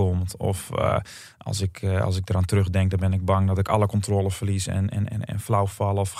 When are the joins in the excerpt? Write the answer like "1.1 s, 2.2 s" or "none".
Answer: none